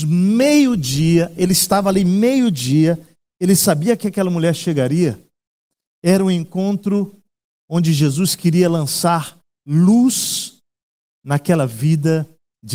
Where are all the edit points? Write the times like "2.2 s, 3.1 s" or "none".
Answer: none